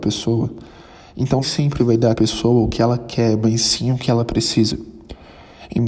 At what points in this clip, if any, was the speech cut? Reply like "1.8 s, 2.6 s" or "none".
1.4 s, 1.8 s, 2.1 s